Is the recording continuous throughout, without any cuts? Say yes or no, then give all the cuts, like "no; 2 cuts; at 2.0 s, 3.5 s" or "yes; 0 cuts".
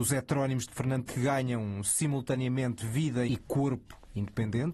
no; 2 cuts; at 1.1 s, 3.3 s